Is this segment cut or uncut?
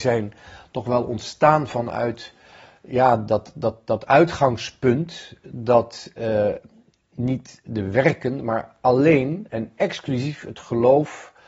uncut